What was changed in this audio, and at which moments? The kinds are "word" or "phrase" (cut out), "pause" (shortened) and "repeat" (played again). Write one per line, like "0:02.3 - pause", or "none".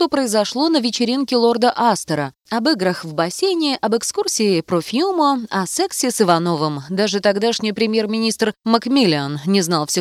0:02.4 - pause